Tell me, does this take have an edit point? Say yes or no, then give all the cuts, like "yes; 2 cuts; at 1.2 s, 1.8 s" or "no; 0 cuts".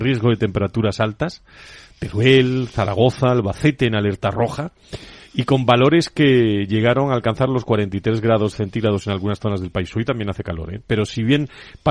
no; 0 cuts